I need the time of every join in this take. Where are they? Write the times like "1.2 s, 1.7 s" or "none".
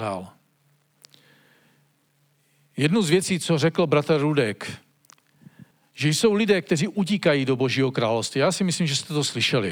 5.7 s